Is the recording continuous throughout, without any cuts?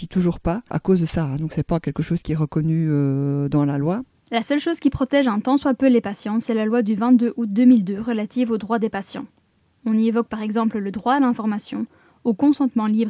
yes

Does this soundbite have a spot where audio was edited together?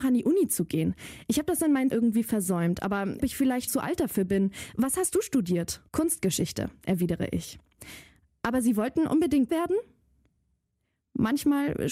yes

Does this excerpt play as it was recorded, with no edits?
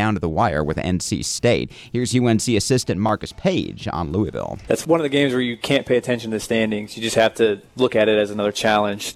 yes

